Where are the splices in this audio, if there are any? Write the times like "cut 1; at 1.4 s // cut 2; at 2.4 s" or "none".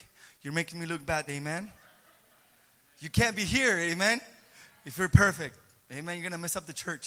cut 1; at 1.3 s